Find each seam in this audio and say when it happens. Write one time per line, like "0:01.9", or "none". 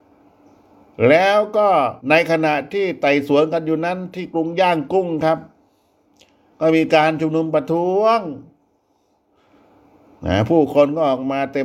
0:02.0